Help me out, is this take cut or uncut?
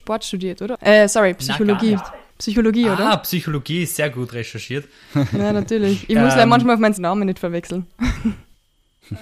cut